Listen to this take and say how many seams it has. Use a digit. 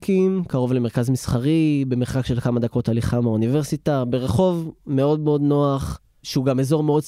0